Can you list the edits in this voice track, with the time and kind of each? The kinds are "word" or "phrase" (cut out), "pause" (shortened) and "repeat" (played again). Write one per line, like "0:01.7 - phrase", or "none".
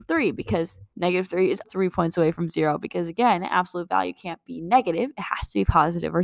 0:00.9 - pause
0:01.6 - word